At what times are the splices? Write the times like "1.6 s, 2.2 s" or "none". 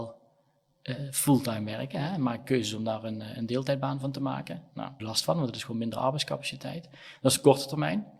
5.0 s